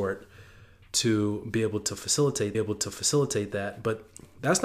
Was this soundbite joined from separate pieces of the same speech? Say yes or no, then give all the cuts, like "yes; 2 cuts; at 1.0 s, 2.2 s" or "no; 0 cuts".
yes; 1 cut; at 2.5 s